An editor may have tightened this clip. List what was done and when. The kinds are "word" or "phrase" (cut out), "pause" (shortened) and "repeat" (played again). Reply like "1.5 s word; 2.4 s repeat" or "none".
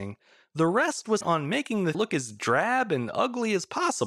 1.2 s word; 1.9 s word